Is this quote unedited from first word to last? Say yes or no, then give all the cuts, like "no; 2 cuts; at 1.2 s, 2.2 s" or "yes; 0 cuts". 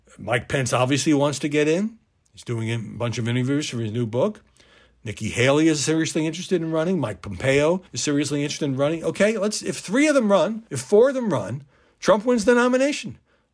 no; 2 cuts; at 7.9 s, 10.7 s